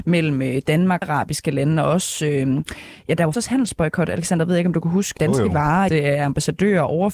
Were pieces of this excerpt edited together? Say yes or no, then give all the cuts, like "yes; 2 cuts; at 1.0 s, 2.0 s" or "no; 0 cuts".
yes; 4 cuts; at 1.0 s, 3.3 s, 5.2 s, 5.9 s